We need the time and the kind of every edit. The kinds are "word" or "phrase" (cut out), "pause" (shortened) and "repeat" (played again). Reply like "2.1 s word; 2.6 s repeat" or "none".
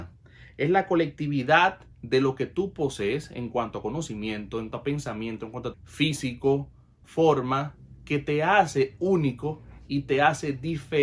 1.9 s pause; 4.7 s word; 5.7 s word; 7.0 s word